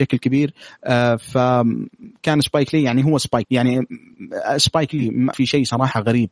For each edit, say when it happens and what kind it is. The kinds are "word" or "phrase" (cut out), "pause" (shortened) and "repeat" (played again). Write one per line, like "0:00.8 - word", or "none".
0:03.4 - word
0:05.3 - word